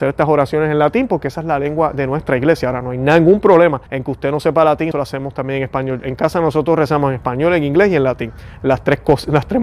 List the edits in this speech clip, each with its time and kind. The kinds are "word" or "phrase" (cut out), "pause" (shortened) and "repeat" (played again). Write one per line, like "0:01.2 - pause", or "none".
0:03.9 - pause
0:04.9 - word